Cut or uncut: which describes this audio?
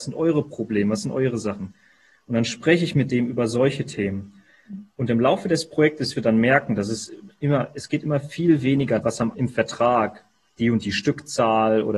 cut